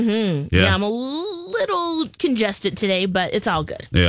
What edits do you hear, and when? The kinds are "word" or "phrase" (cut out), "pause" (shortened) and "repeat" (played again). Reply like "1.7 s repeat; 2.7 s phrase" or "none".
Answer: none